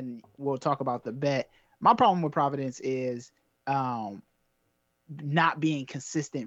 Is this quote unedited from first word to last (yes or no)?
yes